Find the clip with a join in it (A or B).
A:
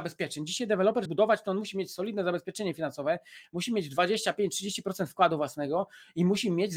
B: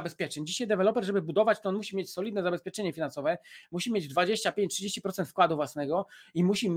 A